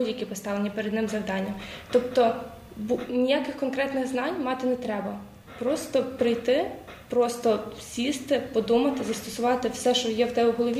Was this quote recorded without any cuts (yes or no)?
yes